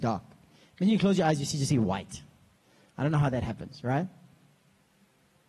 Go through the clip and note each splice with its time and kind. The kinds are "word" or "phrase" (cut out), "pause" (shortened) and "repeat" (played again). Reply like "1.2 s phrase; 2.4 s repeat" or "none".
none